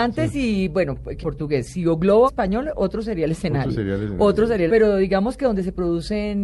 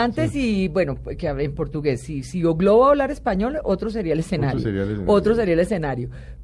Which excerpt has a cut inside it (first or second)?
first